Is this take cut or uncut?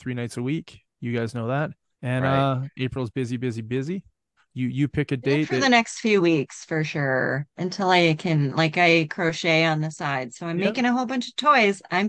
cut